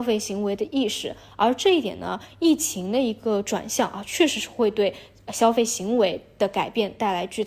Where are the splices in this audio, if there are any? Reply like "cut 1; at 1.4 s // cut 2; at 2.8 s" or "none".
none